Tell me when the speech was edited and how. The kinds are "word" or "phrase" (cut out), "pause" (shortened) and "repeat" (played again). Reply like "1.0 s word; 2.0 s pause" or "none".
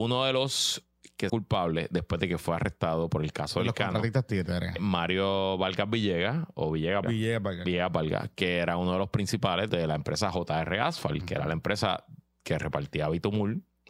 1.3 s phrase; 4.8 s word; 7.0 s word; 9.7 s phrase